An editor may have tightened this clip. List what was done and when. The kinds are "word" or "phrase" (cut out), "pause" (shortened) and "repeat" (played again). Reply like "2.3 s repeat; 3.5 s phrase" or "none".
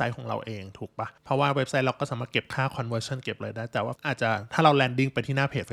1.2 s pause; 4.0 s word